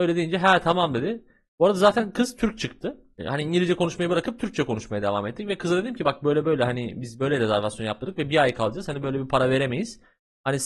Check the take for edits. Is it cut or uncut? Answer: uncut